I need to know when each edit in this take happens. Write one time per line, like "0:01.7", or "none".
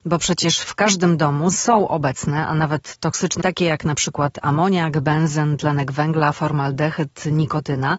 0:01.5
0:03.4